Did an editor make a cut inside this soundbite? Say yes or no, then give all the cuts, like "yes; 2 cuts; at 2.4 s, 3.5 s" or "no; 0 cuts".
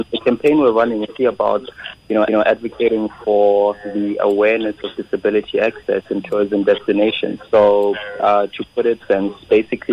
yes; 3 cuts; at 1.2 s, 2.3 s, 9.0 s